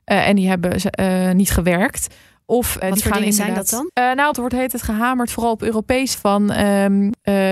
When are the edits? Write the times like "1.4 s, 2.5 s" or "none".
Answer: 2.8 s, 3.9 s, 4.3 s, 6.1 s